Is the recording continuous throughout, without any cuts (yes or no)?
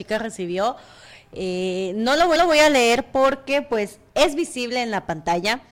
no